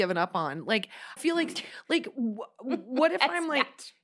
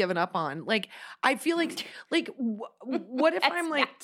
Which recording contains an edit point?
first; 1 cut; at 1.2 s

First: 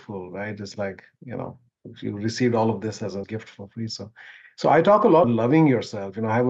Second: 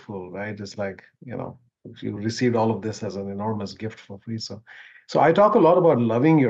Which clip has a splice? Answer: first; 2 cuts; at 3.2 s, 5.2 s

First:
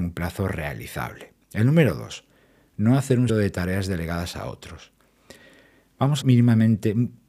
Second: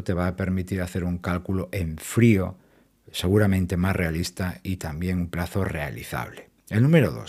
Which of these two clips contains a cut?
first; 2 cuts; at 3.3 s, 6.2 s

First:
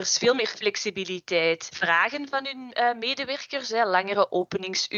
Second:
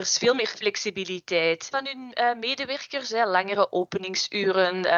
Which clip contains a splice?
second; 1 cut; at 1.7 s

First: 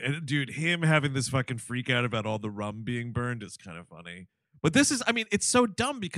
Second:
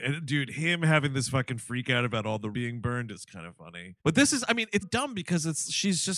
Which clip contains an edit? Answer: second; 3 cuts; at 2.5 s, 4.0 s, 4.8 s

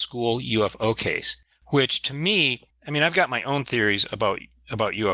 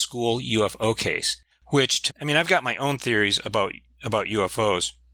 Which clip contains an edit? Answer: second; 1 cut; at 2.1 s

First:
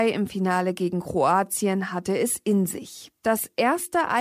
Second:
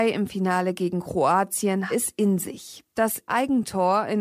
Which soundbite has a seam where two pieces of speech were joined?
second; 2 cuts; at 1.9 s, 3.3 s

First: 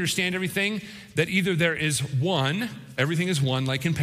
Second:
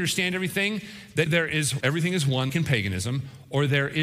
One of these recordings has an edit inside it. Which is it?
second; 3 cuts; at 1.3 s, 1.8 s, 2.5 s

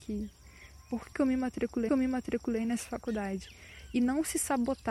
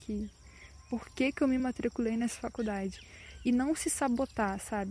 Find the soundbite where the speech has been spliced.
first; 2 cuts; at 1.1 s, 1.9 s

